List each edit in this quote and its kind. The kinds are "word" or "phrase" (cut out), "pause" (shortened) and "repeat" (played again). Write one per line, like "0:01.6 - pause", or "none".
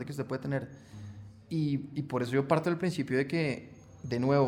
none